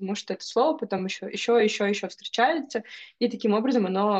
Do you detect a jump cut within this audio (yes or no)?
no